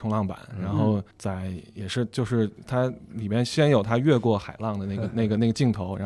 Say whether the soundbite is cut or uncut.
cut